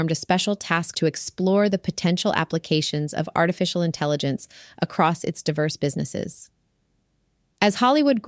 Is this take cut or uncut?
cut